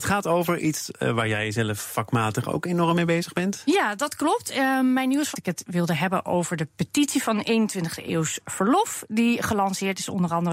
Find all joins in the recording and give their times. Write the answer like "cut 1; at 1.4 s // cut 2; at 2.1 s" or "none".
cut 1; at 5.3 s